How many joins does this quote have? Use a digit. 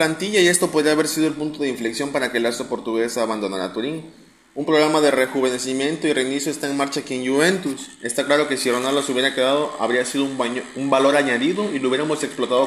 0